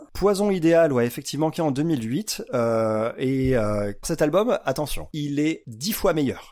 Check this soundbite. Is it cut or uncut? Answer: cut